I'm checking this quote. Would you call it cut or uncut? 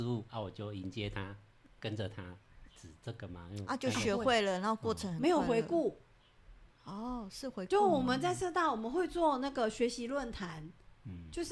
cut